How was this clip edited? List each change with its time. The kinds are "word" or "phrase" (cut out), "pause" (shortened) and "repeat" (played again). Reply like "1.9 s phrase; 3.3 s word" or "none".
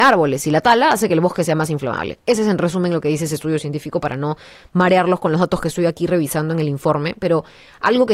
none